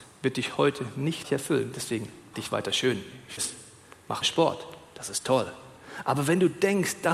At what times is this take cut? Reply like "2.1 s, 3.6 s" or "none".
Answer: 1.2 s, 2.3 s, 3.4 s, 4.2 s